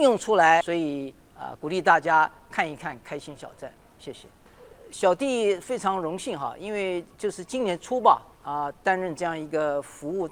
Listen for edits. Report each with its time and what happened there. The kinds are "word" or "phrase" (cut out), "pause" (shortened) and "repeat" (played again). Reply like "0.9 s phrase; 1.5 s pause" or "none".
8.3 s pause